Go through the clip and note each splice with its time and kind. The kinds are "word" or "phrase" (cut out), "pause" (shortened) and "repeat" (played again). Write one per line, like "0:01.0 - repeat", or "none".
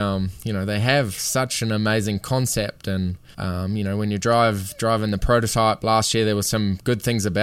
0:03.3 - pause